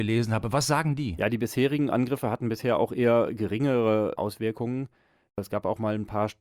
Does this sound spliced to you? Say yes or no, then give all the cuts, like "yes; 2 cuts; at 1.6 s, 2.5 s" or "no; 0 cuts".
no; 0 cuts